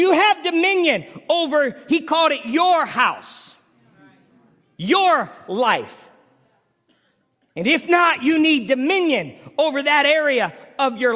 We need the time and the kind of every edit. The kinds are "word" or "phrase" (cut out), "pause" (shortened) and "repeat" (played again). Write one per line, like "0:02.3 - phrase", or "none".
none

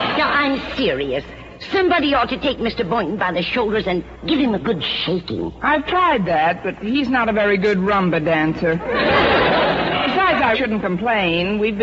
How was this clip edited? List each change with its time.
0:10.5 - word

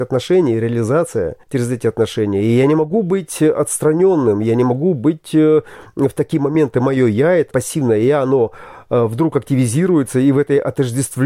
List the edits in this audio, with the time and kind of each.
0:01.4 - pause
0:07.5 - word

